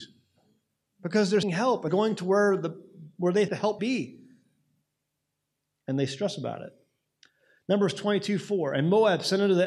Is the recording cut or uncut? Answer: cut